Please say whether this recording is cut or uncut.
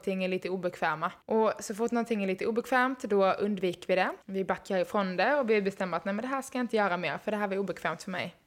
cut